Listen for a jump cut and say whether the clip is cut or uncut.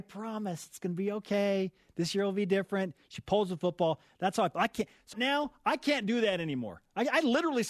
cut